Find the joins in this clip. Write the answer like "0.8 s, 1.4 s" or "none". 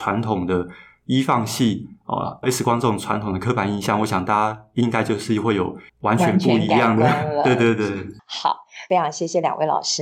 2.4 s, 5.9 s